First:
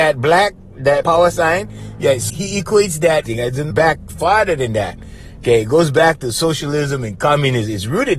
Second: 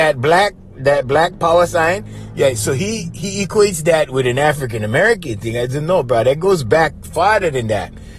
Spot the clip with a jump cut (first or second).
first